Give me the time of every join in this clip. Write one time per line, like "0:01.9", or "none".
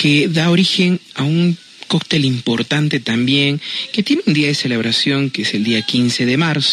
none